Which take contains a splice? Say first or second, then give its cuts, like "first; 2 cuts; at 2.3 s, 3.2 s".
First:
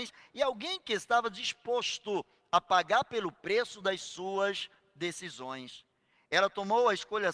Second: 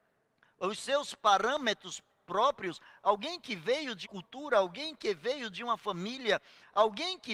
second; 1 cut; at 4.0 s